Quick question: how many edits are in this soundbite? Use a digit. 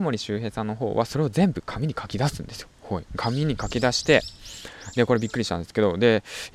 2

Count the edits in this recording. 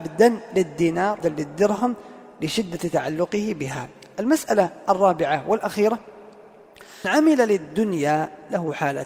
2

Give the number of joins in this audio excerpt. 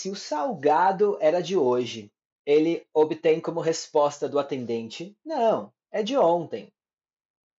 1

